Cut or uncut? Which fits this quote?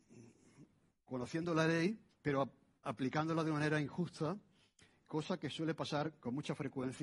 cut